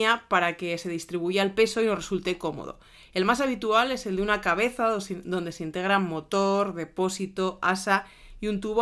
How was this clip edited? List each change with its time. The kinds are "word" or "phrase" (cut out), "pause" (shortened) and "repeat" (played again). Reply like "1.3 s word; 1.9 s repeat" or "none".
none